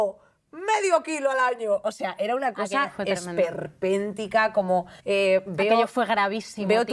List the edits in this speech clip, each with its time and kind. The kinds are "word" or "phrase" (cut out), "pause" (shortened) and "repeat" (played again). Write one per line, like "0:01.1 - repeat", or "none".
0:05.0 - pause